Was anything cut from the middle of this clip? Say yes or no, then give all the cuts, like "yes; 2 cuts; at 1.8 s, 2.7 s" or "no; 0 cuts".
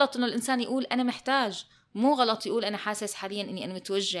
no; 0 cuts